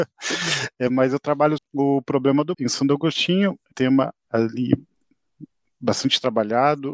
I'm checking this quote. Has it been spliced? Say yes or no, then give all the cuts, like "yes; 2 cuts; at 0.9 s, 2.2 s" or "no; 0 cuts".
yes; 3 cuts; at 1.6 s, 2.5 s, 3.7 s